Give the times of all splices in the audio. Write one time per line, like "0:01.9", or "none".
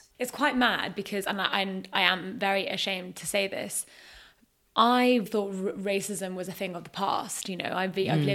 0:05.3